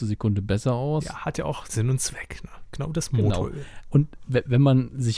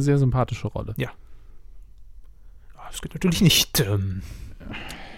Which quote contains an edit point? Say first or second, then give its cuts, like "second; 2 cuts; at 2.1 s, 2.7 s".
first; 1 cut; at 1.6 s